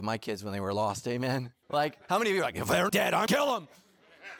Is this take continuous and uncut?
no; 3 cuts; at 1.6 s, 2.9 s, 3.3 s

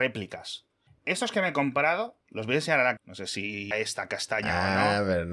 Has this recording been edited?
yes; 3 cuts; at 2.2 s, 3.0 s, 3.7 s

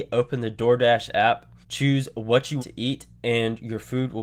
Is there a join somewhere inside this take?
yes; 2 cuts; at 1.6 s, 2.6 s

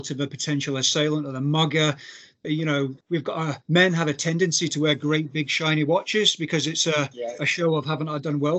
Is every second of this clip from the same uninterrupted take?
no; 3 cuts; at 2.4 s, 3.0 s, 3.6 s

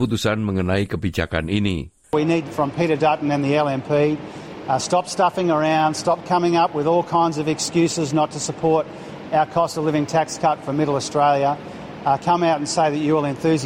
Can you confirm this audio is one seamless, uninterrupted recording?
no; 1 cut; at 2.5 s

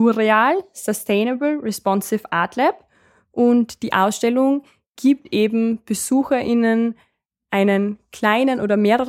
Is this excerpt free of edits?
yes; 0 cuts

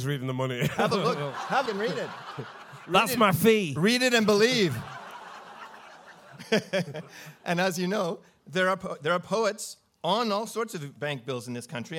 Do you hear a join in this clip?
yes; 1 cut; at 1.7 s

